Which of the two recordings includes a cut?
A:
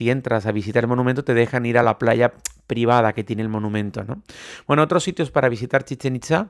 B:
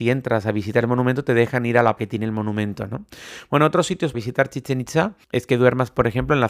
B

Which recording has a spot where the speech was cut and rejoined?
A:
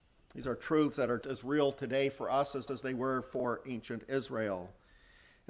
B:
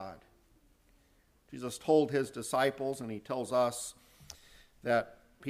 A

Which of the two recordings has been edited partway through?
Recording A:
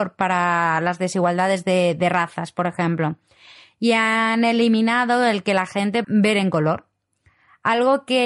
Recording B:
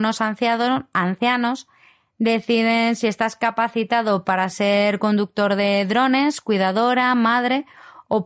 A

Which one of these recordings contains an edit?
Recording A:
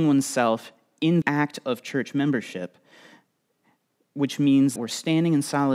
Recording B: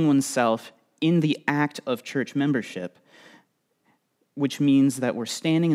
A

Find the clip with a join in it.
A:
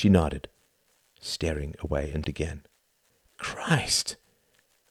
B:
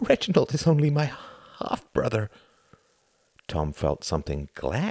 A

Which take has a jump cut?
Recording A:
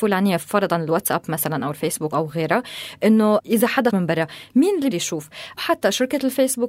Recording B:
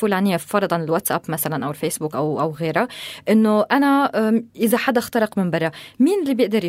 A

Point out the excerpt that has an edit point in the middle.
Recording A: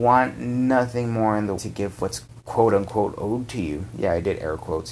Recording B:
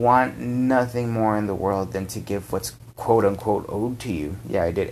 A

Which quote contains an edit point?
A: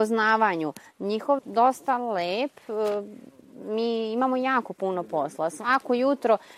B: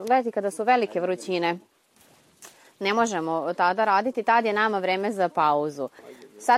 A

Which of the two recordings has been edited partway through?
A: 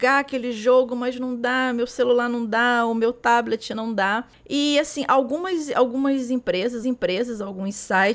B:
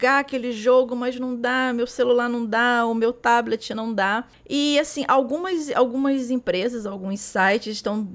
A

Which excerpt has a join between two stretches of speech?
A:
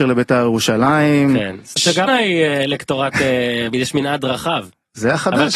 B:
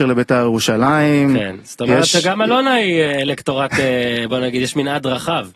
A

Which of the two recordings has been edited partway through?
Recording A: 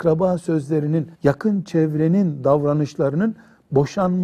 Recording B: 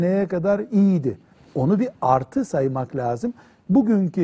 A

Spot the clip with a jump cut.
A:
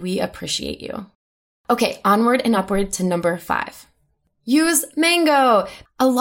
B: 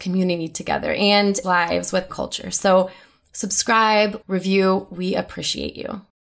B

